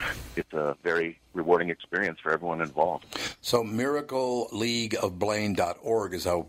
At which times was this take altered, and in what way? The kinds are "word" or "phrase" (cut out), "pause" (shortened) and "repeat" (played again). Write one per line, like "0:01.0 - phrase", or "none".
none

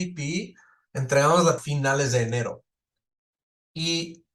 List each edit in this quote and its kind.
0:01.6 - phrase

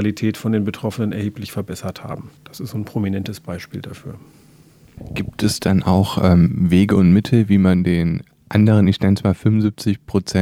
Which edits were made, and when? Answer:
0:02.4 - pause

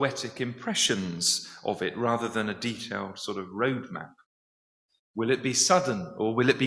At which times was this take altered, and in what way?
none

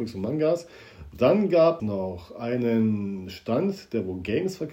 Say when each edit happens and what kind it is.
0:01.8 - word

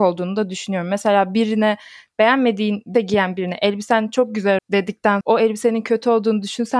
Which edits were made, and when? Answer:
0:02.9 - word
0:04.6 - word
0:05.2 - word

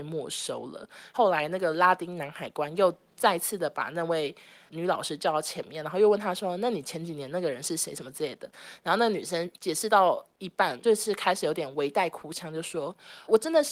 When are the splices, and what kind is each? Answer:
none

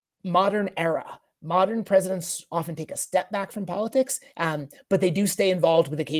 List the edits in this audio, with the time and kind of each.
none

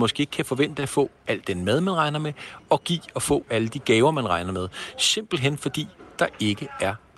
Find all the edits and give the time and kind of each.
0:02.8 - word

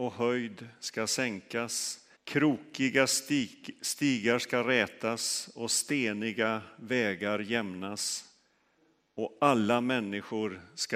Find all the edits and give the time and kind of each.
0:02.2 - pause

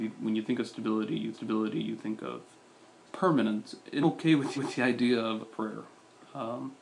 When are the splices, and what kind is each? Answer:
0:01.3 - repeat
0:03.1 - word
0:04.0 - word
0:04.6 - repeat
0:05.4 - phrase

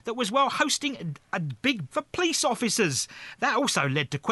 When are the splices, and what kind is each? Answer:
0:01.9 - word

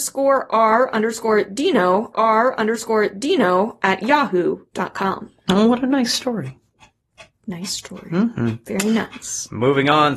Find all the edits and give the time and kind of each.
0:02.1 - repeat

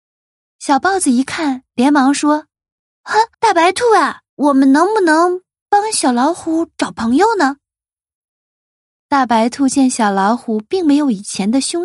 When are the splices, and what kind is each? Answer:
0:03.3 - pause
0:04.3 - pause

